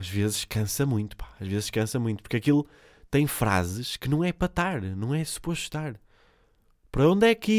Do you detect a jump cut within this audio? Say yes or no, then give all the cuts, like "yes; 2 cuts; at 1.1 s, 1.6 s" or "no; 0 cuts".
no; 0 cuts